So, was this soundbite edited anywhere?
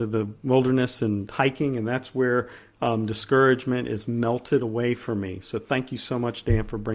no; 0 cuts

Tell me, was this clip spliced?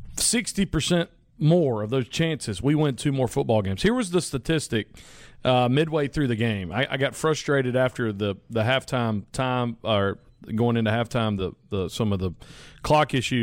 no; 0 cuts

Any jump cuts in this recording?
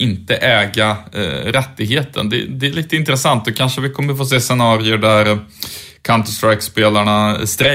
no; 0 cuts

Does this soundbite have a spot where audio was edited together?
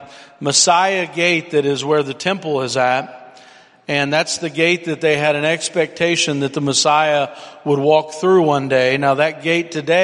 no; 0 cuts

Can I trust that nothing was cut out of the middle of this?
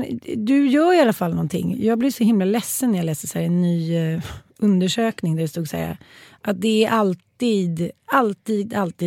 yes; 0 cuts

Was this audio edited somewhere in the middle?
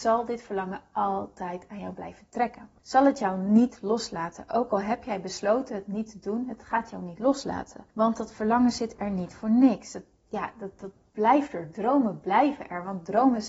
yes; 2 cuts; at 2.8 s, 7.9 s

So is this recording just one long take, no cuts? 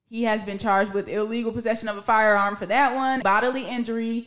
no; 1 cut; at 3.2 s

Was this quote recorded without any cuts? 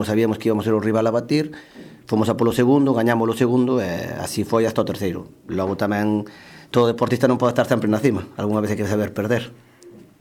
yes; 0 cuts

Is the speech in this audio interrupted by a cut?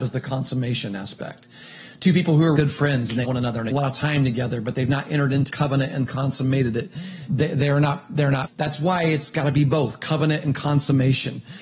yes; 6 cuts; at 2.6 s, 3.2 s, 3.7 s, 5.5 s, 7.3 s, 8.4 s

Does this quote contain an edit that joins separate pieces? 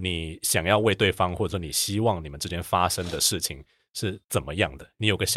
no; 0 cuts

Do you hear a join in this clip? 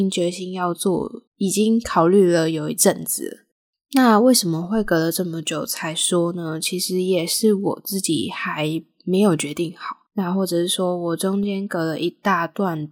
yes; 2 cuts; at 1.3 s, 10.1 s

